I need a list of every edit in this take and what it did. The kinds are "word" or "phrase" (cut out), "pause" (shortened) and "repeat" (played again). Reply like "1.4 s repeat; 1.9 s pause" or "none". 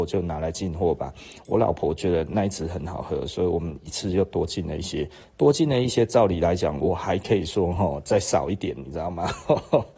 none